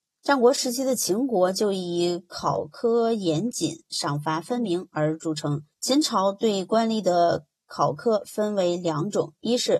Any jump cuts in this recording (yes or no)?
yes